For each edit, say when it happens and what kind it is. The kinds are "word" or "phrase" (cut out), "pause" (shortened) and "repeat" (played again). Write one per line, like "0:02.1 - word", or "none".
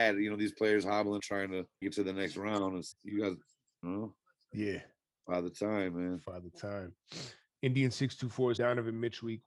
0:01.2 - word
0:01.8 - word
0:02.9 - word
0:03.8 - word
0:08.6 - word